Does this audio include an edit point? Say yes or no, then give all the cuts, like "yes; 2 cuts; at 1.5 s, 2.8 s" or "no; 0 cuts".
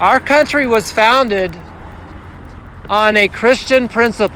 no; 0 cuts